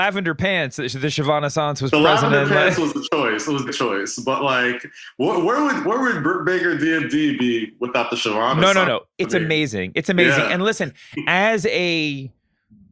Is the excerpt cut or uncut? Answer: cut